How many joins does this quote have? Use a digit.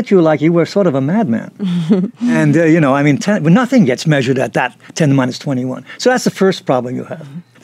0